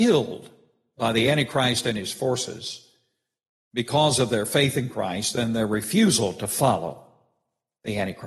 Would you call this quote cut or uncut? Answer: uncut